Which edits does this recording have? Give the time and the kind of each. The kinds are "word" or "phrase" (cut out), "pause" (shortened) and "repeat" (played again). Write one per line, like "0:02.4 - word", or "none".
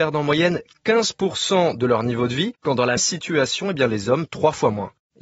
0:03.0 - word
0:04.3 - word